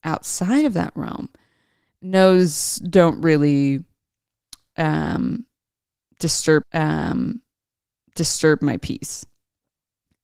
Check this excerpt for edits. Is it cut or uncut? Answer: cut